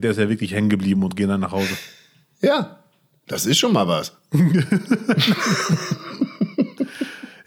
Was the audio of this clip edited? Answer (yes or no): no